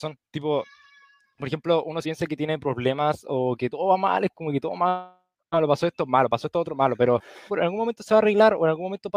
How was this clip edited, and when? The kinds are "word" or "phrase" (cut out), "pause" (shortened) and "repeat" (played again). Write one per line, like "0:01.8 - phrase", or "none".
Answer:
0:02.0 - word
0:07.5 - word